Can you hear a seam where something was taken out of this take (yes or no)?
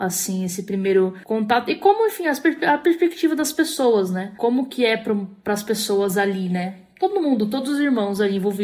no